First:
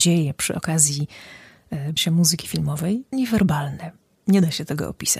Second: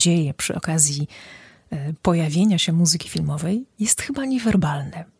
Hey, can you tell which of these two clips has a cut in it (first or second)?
first